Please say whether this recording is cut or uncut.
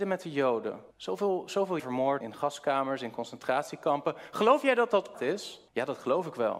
cut